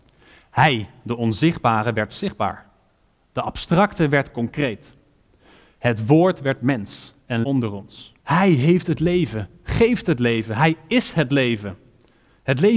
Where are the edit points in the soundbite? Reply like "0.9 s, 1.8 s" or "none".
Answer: 7.4 s, 8.2 s